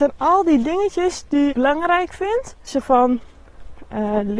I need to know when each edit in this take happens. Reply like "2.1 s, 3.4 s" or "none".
1.5 s, 2.7 s